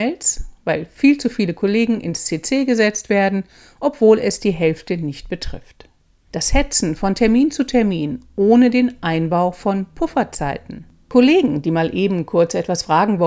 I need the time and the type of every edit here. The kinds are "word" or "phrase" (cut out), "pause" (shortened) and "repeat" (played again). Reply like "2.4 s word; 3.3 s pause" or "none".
none